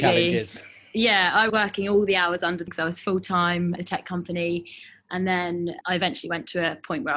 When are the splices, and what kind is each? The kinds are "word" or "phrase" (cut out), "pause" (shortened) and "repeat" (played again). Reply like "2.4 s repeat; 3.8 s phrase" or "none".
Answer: 1.5 s word; 2.7 s word; 3.8 s word; 5.8 s word